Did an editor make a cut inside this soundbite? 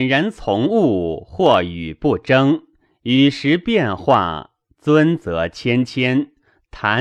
no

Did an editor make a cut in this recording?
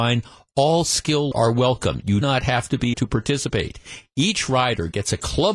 yes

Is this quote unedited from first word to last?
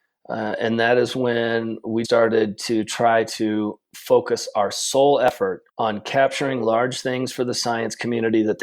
no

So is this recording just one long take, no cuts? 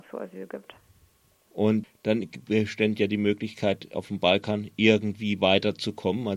yes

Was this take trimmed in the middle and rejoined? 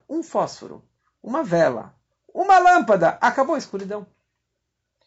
no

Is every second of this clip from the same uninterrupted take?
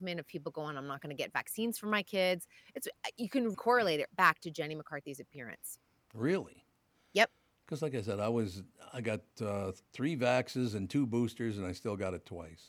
no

